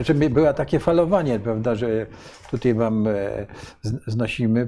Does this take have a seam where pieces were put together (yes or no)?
no